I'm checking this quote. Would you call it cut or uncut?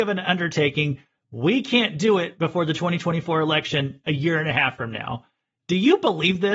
uncut